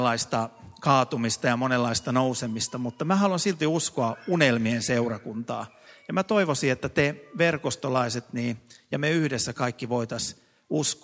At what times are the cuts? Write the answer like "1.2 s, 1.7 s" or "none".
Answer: none

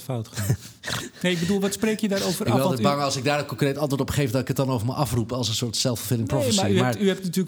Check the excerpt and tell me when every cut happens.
none

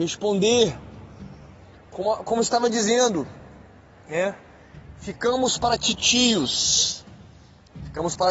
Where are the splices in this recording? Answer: none

